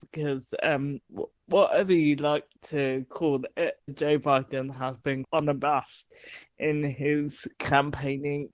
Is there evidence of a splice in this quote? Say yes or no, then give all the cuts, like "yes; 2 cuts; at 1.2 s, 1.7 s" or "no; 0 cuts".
yes; 3 cuts; at 1.0 s, 3.9 s, 5.2 s